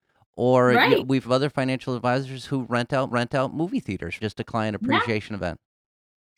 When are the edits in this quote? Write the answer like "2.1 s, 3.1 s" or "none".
1.2 s, 3.1 s, 4.2 s